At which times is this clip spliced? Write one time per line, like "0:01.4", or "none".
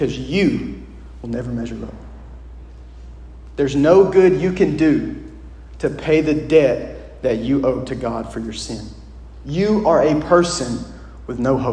none